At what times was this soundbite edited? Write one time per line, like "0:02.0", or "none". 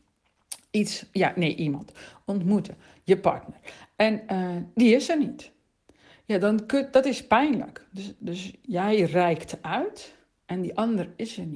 none